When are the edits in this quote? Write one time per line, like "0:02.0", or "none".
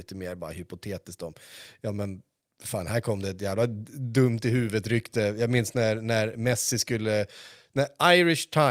none